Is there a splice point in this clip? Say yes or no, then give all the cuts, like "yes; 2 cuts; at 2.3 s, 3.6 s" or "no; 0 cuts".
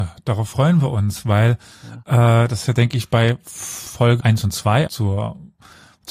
yes; 3 cuts; at 2.7 s, 4.2 s, 4.9 s